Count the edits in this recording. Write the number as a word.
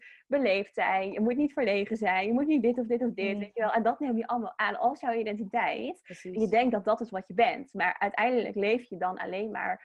zero